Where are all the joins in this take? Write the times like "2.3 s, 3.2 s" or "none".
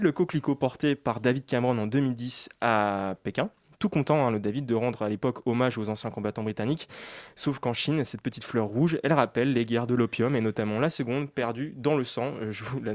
none